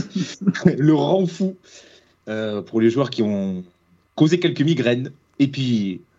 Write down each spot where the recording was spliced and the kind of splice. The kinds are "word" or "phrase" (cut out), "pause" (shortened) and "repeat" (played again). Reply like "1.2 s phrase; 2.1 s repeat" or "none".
none